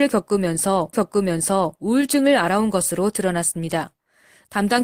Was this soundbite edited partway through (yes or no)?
yes